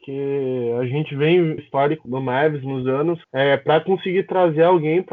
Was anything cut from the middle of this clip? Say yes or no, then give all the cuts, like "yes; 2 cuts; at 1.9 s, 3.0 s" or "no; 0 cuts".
yes; 4 cuts; at 1.6 s, 2.0 s, 2.8 s, 3.2 s